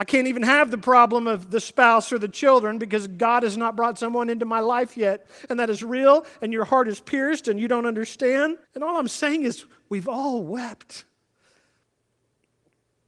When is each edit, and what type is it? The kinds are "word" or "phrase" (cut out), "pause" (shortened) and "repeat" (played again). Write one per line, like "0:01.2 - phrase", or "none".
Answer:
0:08.6 - pause